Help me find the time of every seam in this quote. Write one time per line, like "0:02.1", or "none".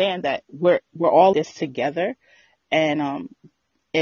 0:01.3